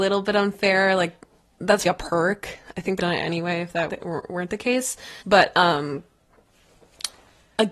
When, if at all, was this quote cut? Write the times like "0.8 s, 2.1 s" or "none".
1.9 s, 3.0 s, 3.9 s, 5.2 s